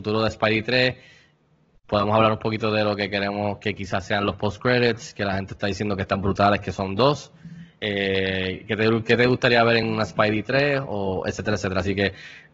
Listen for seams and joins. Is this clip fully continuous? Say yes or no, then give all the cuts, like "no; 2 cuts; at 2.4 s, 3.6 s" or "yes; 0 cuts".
yes; 0 cuts